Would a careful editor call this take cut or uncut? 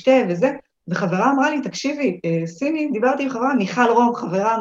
uncut